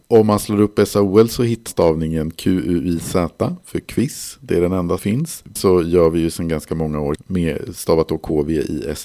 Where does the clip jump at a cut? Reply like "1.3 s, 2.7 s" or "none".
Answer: 1.7 s, 5.0 s, 5.6 s, 7.2 s